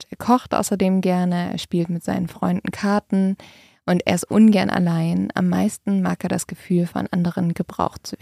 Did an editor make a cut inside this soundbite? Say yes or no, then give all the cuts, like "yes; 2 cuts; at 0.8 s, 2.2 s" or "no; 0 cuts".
no; 0 cuts